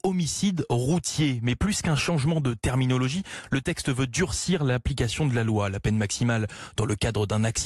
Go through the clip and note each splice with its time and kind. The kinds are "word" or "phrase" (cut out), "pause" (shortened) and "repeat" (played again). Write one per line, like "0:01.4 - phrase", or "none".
none